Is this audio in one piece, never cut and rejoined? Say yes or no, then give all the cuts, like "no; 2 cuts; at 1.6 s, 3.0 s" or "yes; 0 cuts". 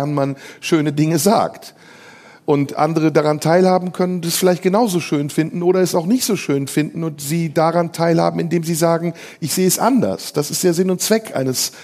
yes; 0 cuts